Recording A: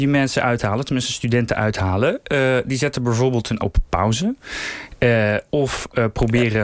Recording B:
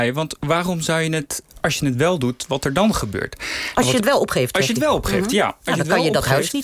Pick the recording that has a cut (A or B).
A